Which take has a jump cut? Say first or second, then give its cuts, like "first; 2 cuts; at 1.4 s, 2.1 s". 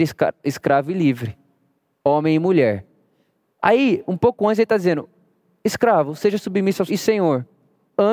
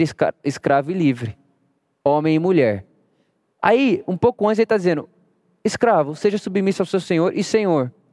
first; 1 cut; at 6.9 s